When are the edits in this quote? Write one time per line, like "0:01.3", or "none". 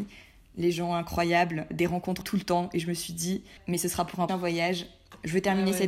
0:01.7
0:02.2
0:03.6
0:04.3